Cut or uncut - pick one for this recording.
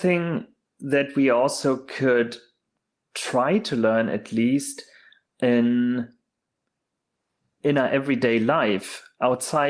uncut